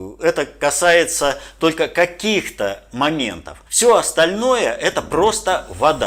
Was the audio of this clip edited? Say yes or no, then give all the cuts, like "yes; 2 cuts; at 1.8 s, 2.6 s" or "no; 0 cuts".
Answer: yes; 1 cut; at 3.7 s